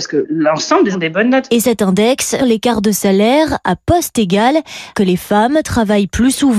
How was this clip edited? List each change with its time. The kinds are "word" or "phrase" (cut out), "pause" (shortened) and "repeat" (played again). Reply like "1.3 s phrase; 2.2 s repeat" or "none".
0.9 s word; 2.4 s word; 4.9 s word